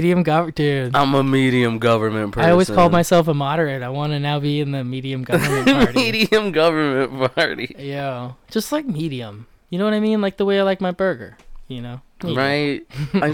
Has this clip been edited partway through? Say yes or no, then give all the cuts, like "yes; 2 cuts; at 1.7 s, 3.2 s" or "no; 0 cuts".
no; 0 cuts